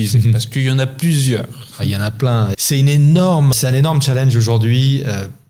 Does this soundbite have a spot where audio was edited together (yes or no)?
yes